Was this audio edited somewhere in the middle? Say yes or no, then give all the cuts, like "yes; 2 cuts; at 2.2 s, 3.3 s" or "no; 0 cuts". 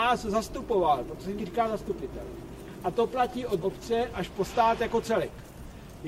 yes; 2 cuts; at 1.4 s, 3.6 s